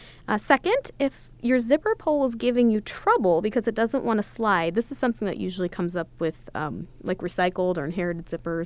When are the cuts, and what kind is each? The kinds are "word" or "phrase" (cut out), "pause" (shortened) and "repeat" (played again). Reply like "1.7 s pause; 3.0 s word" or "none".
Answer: none

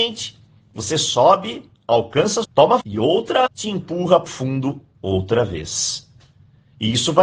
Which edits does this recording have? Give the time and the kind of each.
2.4 s word; 2.8 s word; 3.5 s word; 4.3 s word

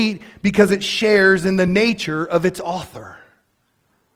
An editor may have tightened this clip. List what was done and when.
none

